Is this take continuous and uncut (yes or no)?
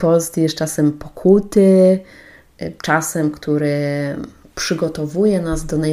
yes